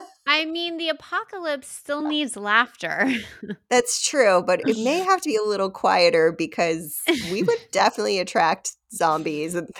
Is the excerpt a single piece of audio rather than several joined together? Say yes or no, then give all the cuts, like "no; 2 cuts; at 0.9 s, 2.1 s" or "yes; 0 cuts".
yes; 0 cuts